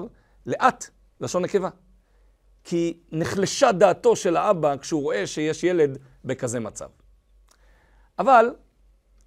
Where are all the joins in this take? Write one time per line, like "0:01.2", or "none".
none